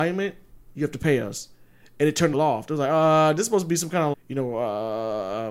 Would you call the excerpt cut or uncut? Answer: cut